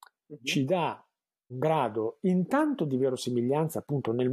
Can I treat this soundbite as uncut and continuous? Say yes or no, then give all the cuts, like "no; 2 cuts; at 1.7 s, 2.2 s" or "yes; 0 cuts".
no; 1 cut; at 1.5 s